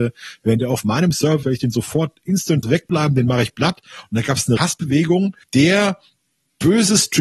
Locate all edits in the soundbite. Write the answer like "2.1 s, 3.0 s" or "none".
1.4 s, 2.6 s, 4.6 s, 5.4 s